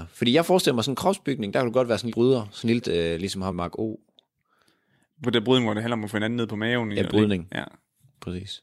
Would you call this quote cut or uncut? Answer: cut